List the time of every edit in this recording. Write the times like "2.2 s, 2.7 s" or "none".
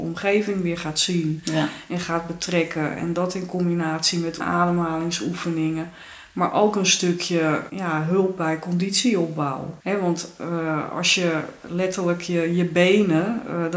4.4 s, 7.7 s, 9.8 s